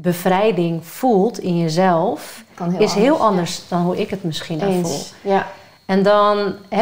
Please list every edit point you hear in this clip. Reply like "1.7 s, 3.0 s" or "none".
4.6 s